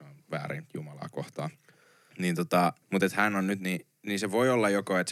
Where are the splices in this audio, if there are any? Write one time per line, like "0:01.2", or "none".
0:02.8